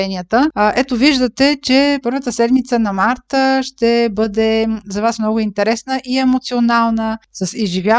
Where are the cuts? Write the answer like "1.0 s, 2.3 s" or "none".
2.0 s